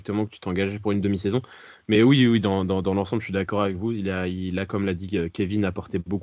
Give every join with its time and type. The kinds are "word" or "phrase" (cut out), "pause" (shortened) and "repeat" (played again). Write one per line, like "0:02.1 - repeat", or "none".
none